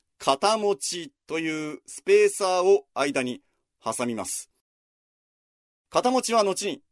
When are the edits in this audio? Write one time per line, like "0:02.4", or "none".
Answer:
none